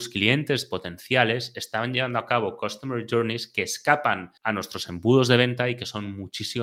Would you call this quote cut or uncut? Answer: cut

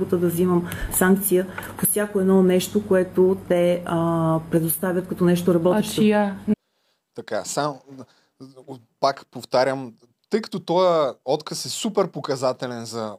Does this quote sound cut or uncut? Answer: uncut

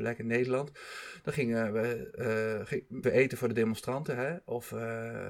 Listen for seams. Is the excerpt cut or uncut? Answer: cut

